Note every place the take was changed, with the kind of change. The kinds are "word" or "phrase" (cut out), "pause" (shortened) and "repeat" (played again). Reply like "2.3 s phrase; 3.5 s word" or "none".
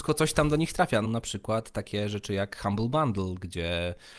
1.0 s phrase